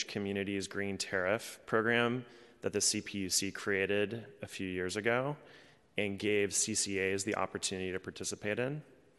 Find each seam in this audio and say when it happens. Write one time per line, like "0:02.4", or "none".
none